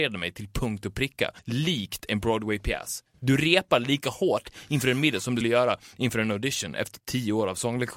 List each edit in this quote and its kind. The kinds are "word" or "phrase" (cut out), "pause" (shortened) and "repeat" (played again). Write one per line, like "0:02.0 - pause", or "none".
0:01.4 - pause
0:05.4 - word